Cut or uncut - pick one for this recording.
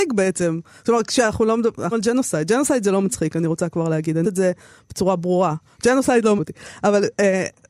cut